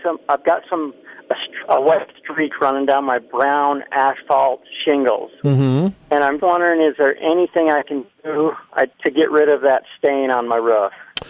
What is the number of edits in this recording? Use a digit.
3